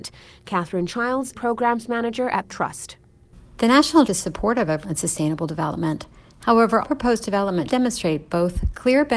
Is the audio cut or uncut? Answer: cut